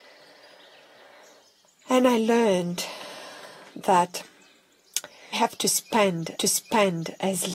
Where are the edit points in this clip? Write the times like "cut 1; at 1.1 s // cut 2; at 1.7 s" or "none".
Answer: cut 1; at 5.3 s // cut 2; at 6.4 s